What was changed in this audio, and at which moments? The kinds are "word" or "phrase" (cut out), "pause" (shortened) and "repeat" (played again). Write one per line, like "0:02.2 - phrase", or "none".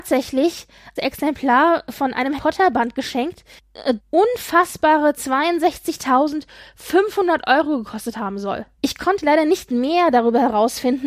0:01.0 - phrase
0:02.4 - word
0:04.0 - word
0:08.7 - pause